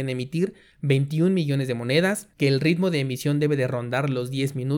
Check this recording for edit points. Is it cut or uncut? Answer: cut